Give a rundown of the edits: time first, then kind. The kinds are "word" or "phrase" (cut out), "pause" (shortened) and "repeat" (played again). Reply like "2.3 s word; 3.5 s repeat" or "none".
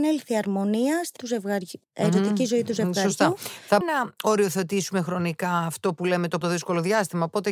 1.2 s word; 1.8 s pause; 3.8 s word; 6.4 s word